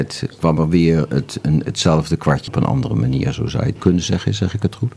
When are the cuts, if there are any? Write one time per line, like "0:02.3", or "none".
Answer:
0:01.7
0:02.5
0:03.8